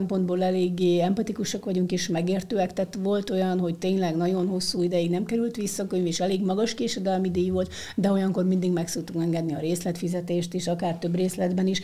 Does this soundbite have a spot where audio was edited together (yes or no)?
no